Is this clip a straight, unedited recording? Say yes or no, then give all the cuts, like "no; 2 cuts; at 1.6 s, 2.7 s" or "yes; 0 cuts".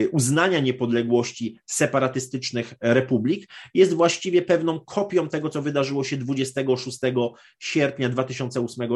yes; 0 cuts